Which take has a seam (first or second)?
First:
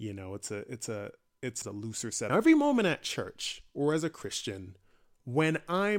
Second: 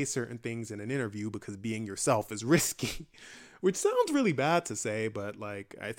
first